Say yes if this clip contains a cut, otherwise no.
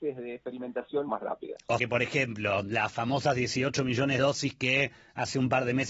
yes